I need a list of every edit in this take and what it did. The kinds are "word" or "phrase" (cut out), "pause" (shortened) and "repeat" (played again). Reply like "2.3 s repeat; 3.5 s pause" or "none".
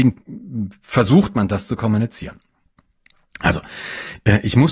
none